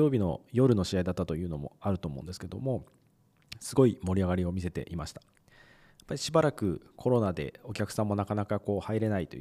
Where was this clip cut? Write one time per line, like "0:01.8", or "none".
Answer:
none